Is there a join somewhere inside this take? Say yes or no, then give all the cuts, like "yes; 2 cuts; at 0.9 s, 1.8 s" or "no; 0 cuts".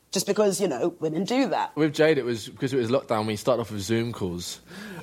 no; 0 cuts